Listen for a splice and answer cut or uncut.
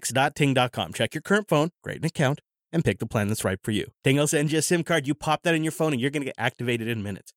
cut